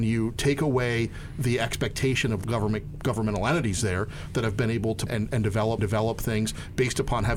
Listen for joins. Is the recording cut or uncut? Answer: cut